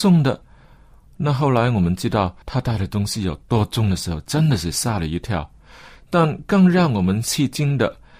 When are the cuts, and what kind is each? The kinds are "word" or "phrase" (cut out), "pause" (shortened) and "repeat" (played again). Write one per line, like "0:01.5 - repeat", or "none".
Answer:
0:02.4 - pause